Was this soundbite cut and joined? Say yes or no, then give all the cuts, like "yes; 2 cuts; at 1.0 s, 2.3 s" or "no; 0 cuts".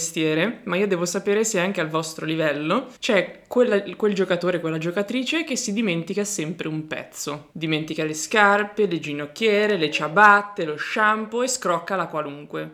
yes; 2 cuts; at 3.0 s, 7.5 s